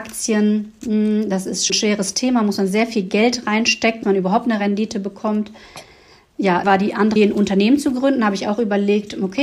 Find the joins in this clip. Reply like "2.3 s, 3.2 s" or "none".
1.7 s, 4.0 s, 6.6 s, 7.2 s